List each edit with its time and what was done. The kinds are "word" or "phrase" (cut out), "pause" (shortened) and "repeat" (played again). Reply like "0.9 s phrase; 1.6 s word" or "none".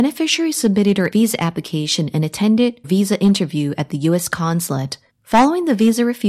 1.1 s word; 2.8 s word; 5.1 s pause